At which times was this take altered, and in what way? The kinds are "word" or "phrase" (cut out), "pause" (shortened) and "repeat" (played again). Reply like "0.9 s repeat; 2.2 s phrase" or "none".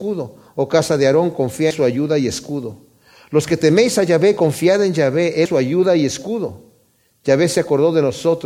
1.7 s phrase; 5.5 s word